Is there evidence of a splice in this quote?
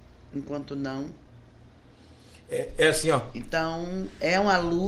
no; 0 cuts

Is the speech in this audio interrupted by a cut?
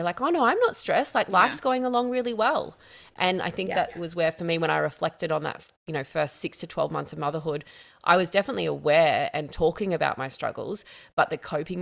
no; 0 cuts

